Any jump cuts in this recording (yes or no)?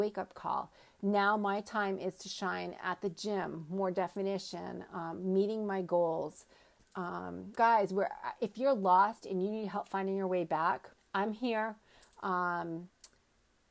yes